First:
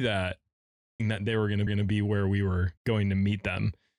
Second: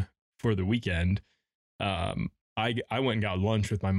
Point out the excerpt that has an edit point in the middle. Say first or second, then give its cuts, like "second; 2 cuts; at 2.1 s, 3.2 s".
first; 3 cuts; at 1.0 s, 1.7 s, 2.8 s